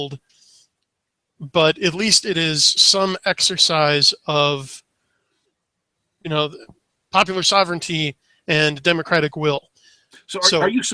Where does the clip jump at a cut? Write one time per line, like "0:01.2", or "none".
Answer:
none